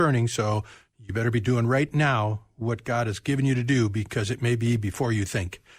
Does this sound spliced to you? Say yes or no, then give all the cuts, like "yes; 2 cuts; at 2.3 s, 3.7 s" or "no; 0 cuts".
no; 0 cuts